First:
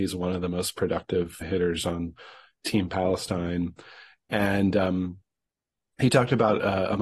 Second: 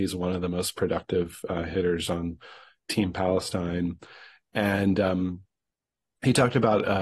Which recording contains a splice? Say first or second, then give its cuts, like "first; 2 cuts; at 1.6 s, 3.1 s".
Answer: first; 1 cut; at 1.4 s